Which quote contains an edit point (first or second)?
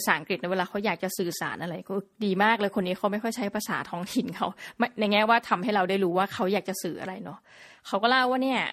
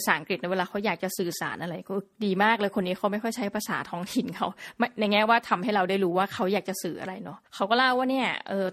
second